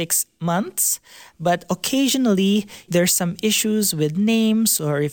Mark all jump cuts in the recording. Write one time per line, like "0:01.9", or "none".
0:02.9